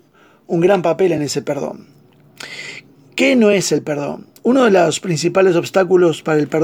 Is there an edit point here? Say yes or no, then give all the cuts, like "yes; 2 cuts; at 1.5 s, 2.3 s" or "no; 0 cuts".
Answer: no; 0 cuts